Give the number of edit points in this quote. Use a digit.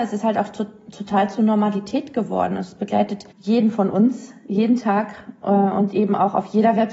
1